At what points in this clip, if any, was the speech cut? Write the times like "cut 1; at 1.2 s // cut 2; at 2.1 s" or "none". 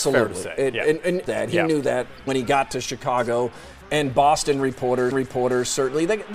cut 1; at 1.3 s // cut 2; at 2.3 s // cut 3; at 5.1 s